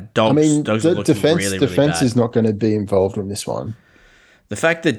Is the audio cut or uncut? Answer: uncut